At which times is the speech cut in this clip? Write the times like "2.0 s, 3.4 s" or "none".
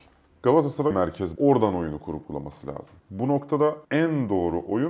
0.9 s, 1.4 s, 3.0 s, 3.8 s

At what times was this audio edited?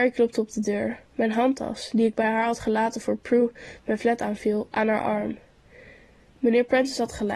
none

